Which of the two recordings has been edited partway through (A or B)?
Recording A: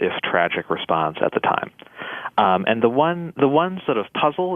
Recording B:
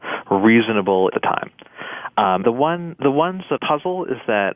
B